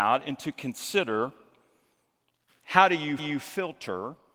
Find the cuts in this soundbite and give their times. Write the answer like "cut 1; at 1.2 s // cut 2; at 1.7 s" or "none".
cut 1; at 2.5 s // cut 2; at 3.2 s